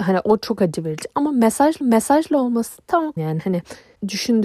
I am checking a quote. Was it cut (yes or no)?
yes